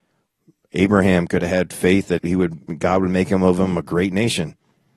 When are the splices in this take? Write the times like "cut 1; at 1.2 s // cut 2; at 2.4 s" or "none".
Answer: cut 1; at 2.2 s